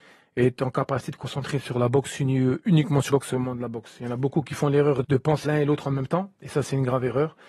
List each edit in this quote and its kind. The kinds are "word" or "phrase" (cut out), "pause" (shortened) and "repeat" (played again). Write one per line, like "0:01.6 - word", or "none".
0:03.1 - word
0:05.0 - word
0:05.4 - word